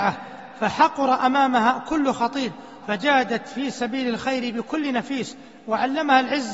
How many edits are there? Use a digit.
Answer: 1